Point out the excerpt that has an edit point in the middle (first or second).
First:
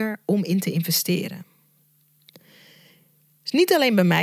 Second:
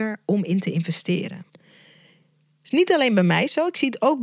second